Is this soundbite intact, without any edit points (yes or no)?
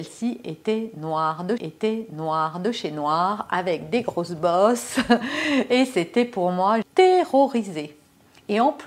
no